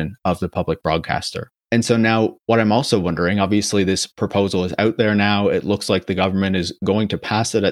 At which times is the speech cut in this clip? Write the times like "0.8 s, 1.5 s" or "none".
1.6 s